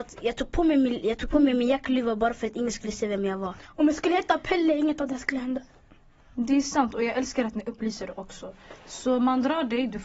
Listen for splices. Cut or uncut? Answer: uncut